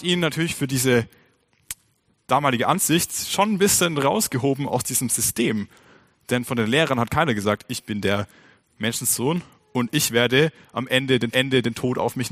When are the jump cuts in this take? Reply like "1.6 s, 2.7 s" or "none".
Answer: 11.3 s